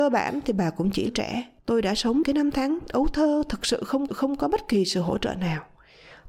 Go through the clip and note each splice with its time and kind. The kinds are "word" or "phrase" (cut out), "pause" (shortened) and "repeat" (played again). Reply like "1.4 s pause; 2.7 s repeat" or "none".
1.1 s phrase; 1.6 s pause; 2.2 s word; 4.1 s repeat